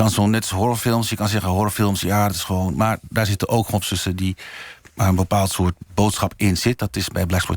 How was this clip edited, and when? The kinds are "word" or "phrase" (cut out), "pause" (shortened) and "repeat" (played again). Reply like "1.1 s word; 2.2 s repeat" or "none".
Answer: 3.8 s word